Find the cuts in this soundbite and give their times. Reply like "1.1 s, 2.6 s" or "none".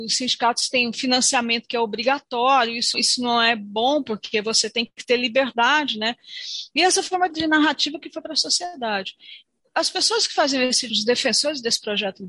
2.9 s, 7.3 s, 10.9 s